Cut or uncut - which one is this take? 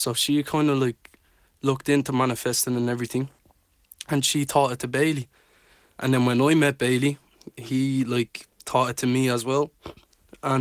uncut